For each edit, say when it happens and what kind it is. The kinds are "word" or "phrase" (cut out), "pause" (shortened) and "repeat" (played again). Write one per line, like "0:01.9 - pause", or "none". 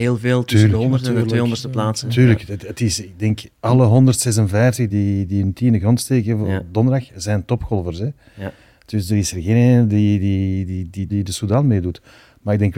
0:03.5 - pause
0:04.9 - word
0:11.1 - phrase